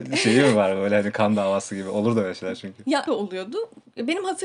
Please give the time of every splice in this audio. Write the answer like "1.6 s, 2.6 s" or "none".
3.1 s